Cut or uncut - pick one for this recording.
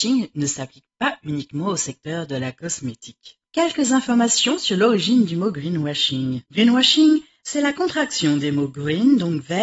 cut